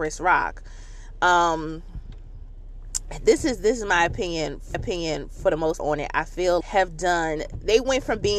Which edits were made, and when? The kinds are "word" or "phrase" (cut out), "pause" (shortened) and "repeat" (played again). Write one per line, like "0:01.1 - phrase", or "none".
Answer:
0:04.7 - repeat
0:05.8 - word
0:06.6 - phrase